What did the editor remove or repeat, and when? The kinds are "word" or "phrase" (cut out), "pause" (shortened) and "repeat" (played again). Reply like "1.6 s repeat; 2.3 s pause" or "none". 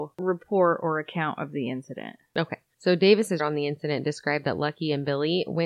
3.4 s word